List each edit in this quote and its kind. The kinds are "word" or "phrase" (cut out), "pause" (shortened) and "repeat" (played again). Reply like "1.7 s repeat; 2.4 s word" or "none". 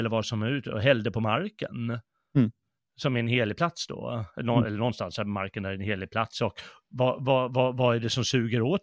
none